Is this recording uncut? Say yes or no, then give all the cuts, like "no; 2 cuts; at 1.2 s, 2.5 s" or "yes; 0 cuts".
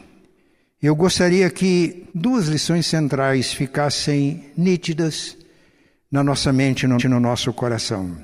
no; 2 cuts; at 2.1 s, 7.0 s